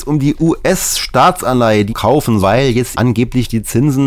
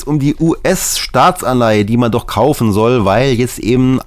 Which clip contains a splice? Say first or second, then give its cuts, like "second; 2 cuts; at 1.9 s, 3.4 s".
first; 3 cuts; at 1.9 s, 2.4 s, 2.9 s